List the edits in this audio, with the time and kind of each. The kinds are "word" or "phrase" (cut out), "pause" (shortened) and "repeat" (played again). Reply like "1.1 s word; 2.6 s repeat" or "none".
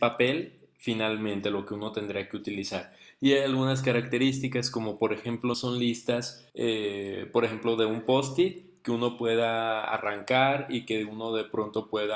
5.5 s word; 6.5 s pause